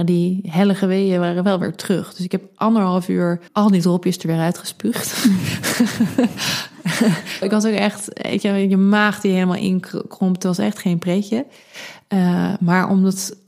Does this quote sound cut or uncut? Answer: cut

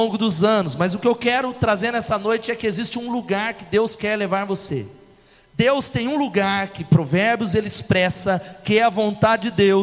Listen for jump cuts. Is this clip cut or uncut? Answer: uncut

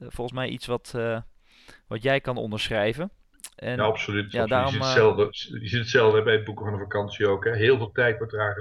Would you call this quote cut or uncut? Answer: uncut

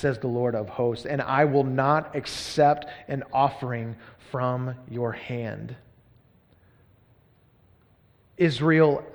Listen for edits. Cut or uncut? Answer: uncut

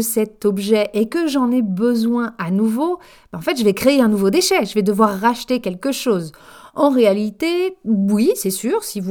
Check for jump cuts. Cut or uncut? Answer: uncut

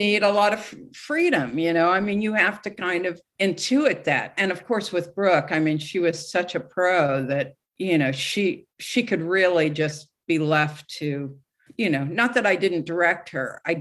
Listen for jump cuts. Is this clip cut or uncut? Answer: cut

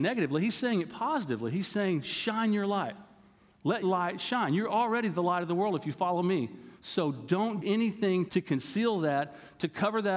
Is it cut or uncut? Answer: cut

